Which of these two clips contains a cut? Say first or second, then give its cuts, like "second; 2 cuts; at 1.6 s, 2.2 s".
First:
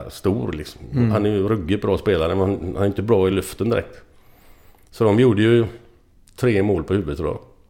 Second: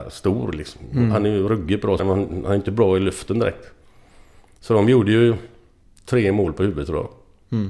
second; 1 cut; at 2.0 s